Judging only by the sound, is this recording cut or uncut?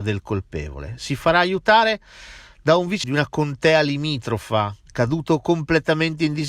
cut